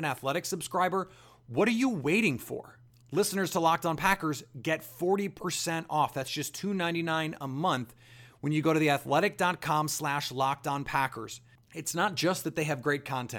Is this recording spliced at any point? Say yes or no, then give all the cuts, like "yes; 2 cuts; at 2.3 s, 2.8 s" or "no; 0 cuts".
no; 0 cuts